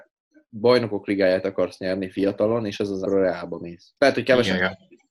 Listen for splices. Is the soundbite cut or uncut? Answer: cut